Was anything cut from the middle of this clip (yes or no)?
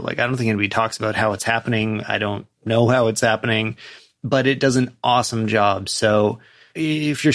no